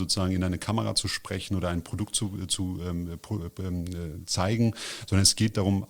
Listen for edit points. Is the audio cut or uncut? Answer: uncut